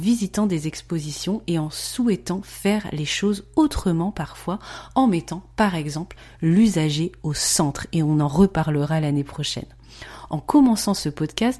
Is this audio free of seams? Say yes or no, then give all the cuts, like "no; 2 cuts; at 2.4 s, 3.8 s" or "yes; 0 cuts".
yes; 0 cuts